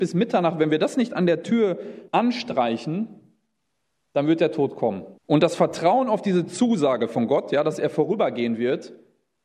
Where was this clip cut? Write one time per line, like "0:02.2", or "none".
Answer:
0:02.1
0:05.2